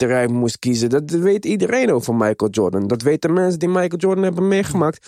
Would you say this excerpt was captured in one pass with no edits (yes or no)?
yes